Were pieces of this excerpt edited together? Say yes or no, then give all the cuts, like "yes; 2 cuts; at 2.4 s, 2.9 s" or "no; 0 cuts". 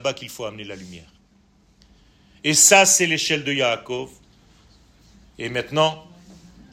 no; 0 cuts